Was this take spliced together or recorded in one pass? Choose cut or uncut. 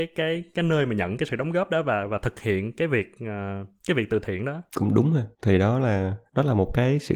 cut